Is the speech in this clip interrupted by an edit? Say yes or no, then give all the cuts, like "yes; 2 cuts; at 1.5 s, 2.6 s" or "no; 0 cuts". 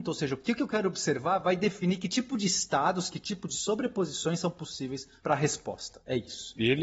no; 0 cuts